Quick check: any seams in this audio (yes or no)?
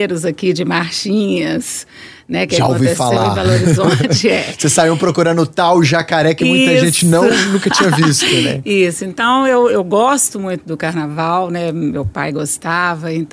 no